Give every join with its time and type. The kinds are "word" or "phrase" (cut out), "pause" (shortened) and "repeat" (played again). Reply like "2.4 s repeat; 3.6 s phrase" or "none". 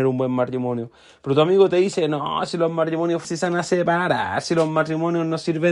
3.2 s word